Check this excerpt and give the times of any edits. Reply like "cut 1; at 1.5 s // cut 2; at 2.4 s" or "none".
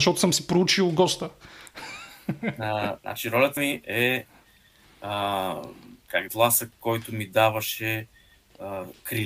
cut 1; at 3.0 s // cut 2; at 3.6 s // cut 3; at 6.3 s